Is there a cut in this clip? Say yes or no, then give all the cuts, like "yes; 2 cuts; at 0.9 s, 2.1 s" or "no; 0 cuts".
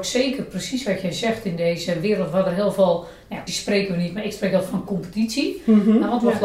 yes; 2 cuts; at 3.5 s, 4.9 s